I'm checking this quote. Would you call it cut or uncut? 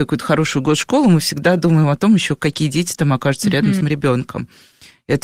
cut